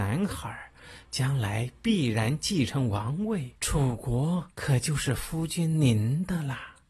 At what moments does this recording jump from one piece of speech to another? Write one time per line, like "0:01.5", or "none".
0:03.6
0:04.5